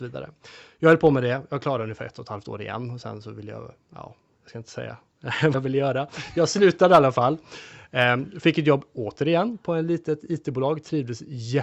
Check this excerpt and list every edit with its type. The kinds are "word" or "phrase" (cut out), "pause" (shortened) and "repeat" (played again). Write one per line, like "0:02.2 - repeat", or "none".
0:05.5 - word